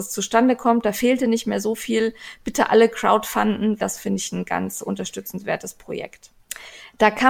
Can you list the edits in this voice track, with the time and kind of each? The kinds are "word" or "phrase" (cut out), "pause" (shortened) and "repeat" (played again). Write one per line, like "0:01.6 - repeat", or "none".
0:03.8 - word

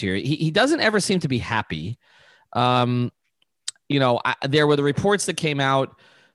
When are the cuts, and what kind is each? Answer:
none

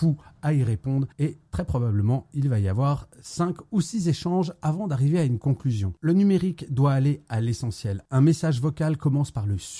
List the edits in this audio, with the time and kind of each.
0:01.1 - pause

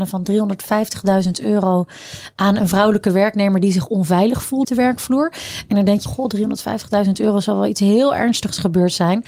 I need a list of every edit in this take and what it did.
0:04.6 - word
0:06.1 - word

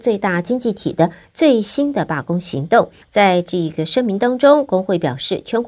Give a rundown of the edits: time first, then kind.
0:03.0 - pause

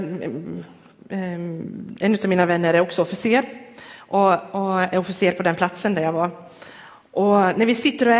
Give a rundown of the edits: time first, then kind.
none

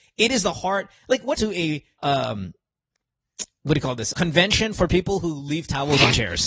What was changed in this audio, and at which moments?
0:01.3 - phrase
0:02.0 - word
0:04.1 - word

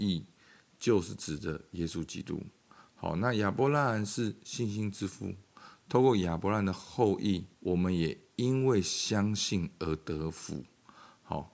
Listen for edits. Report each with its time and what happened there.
0:07.5 - pause

